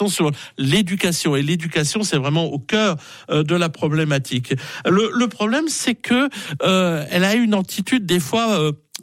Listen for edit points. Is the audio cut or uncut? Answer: uncut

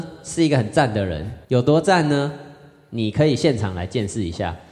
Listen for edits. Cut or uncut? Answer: cut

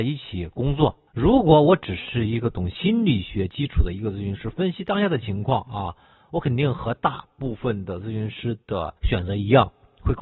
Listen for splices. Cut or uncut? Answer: cut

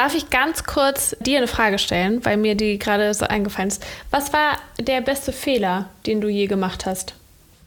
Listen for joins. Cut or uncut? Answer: cut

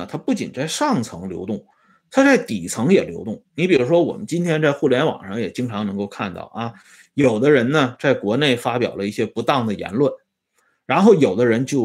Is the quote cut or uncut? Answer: uncut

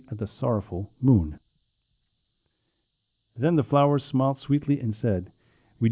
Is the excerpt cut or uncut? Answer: uncut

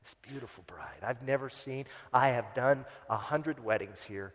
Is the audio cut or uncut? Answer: uncut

